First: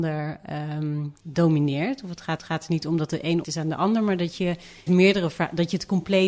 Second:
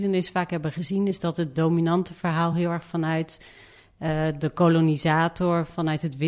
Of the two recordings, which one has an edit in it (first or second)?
first